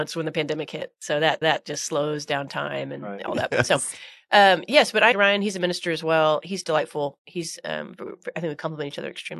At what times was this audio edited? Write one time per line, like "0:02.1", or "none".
0:01.4
0:05.1